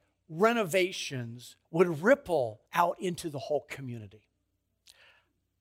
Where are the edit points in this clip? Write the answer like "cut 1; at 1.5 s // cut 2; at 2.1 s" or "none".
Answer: cut 1; at 1.6 s // cut 2; at 2.7 s